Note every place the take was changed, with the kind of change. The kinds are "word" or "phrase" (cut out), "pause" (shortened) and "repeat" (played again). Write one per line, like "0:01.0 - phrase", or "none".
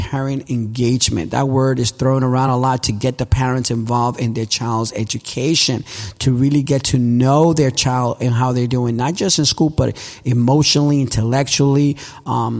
none